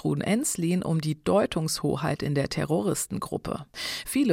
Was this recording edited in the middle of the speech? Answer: no; 0 cuts

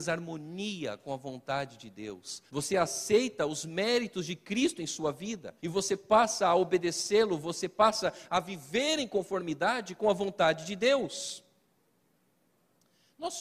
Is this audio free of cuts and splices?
no; 2 cuts; at 2.5 s, 5.6 s

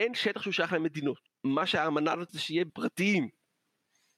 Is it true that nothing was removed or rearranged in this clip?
no; 3 cuts; at 1.3 s, 2.3 s, 2.7 s

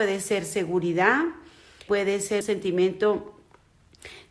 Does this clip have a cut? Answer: yes; 2 cuts; at 1.9 s, 2.4 s

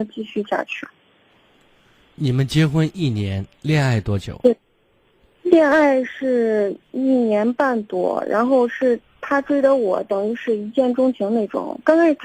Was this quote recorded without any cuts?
yes; 0 cuts

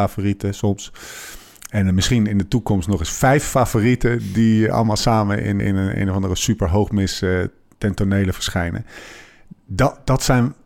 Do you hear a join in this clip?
yes; 1 cut; at 5.6 s

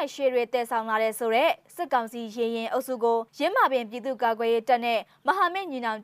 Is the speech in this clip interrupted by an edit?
yes; 1 cut; at 3.3 s

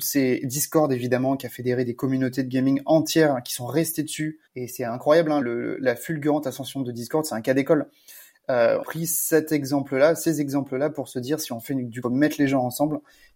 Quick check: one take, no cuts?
no; 4 cuts; at 4.5 s, 5.4 s, 8.8 s, 12.0 s

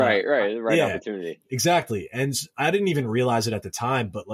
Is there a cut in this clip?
no; 0 cuts

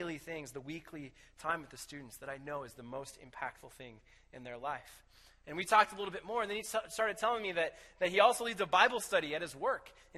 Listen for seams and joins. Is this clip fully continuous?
yes; 0 cuts

